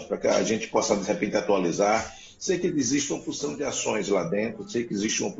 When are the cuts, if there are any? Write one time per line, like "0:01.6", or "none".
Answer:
none